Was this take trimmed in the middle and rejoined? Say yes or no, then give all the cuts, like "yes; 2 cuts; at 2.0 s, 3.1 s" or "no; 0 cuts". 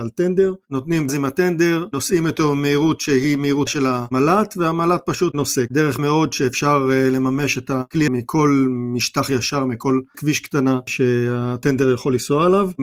yes; 5 cuts; at 1.1 s, 3.7 s, 6.0 s, 8.1 s, 10.1 s